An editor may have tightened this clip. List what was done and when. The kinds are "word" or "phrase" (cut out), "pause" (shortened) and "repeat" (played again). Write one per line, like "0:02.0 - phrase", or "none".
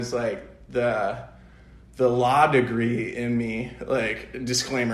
none